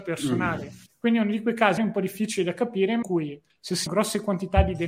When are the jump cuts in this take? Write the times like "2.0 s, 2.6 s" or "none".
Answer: 1.8 s, 3.0 s, 3.9 s